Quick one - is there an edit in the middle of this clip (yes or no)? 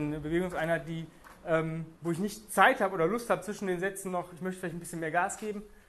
no